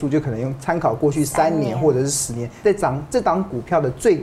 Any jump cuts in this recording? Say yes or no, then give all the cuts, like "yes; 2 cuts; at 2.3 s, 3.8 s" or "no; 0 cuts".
yes; 1 cut; at 2.6 s